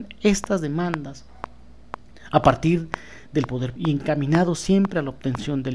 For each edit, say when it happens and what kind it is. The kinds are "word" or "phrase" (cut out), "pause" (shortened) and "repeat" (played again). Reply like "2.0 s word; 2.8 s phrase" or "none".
3.7 s word